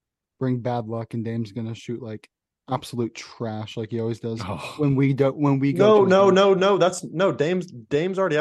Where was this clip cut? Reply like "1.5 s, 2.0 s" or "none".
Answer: none